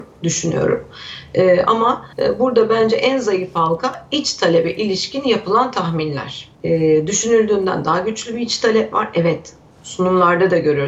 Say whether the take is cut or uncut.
cut